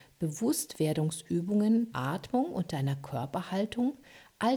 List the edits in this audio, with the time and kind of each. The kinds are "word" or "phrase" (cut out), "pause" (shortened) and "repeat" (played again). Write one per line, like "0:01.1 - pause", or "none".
0:01.9 - word